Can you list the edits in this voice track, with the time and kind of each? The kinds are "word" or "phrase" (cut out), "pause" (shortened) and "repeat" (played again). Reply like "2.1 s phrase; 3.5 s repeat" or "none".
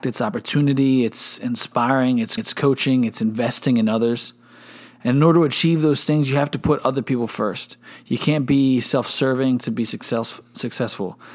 2.4 s repeat